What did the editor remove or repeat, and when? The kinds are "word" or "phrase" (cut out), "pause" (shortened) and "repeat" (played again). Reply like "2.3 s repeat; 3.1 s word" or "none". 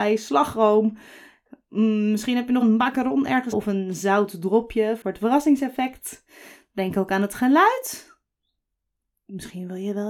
2.6 s word; 3.5 s word